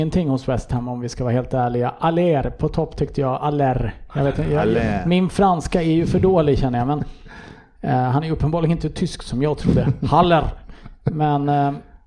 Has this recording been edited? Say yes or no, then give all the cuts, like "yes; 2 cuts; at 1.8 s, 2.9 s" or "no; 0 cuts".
no; 0 cuts